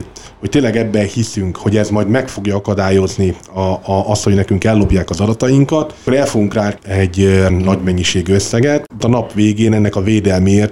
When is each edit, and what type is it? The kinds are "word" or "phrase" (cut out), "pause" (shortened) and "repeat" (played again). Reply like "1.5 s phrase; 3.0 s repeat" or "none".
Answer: 6.1 s word; 6.8 s word; 7.5 s word; 9.0 s word